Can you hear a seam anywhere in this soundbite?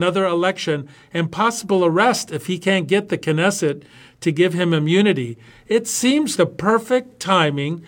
yes; 1 cut; at 6.3 s

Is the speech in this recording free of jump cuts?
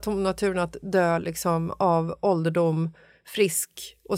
yes; 0 cuts

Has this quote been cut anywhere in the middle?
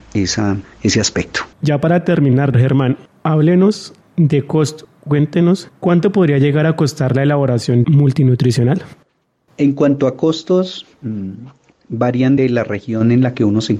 yes; 5 cuts; at 1.5 s, 2.5 s, 7.8 s, 11.7 s, 12.4 s

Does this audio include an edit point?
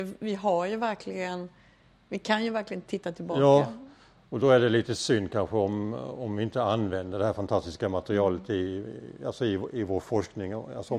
no; 0 cuts

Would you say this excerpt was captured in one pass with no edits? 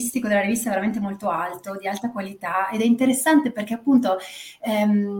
yes; 0 cuts

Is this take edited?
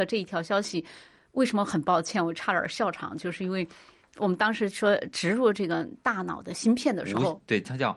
no; 0 cuts

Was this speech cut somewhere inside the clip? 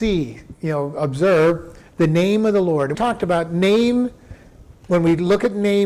yes; 2 cuts; at 1.9 s, 2.9 s

